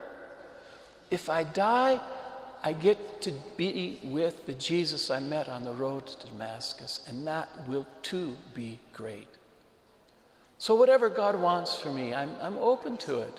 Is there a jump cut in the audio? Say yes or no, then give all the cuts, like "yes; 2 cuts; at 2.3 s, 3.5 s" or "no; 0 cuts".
no; 0 cuts